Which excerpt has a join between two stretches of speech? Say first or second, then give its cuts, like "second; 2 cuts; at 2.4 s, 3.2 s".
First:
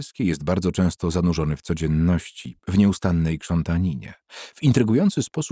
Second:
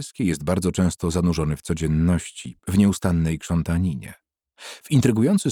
first; 1 cut; at 4.2 s